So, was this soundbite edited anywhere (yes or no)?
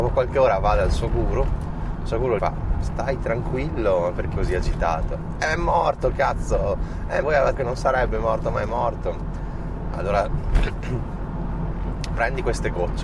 yes